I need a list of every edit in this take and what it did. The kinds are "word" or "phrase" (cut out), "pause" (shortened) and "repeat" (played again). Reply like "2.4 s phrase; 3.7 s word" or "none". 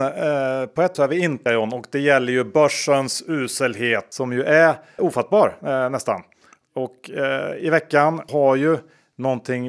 0.9 s word; 1.5 s word; 5.0 s word; 8.3 s word